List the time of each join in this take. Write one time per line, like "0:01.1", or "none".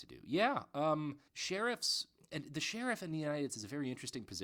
0:01.3
0:03.5